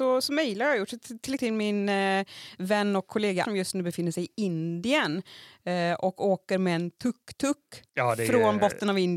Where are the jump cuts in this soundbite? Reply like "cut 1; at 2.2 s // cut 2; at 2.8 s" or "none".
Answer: cut 1; at 1.4 s // cut 2; at 3.4 s // cut 3; at 7.9 s